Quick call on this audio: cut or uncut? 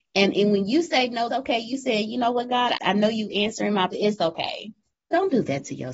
cut